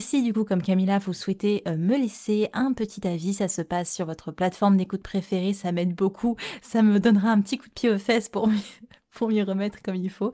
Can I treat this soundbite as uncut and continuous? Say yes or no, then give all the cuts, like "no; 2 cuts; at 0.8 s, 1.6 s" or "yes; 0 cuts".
yes; 0 cuts